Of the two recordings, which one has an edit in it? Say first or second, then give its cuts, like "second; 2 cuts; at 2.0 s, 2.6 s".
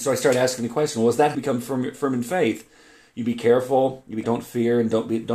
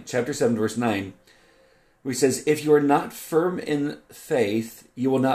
first; 2 cuts; at 1.3 s, 4.2 s